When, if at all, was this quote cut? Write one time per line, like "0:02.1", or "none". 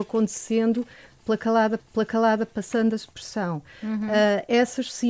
0:01.8